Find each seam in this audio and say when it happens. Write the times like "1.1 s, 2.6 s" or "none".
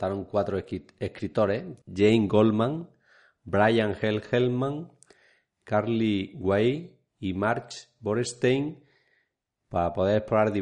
7.1 s